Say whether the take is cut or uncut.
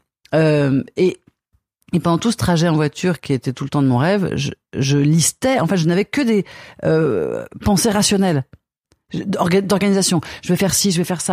uncut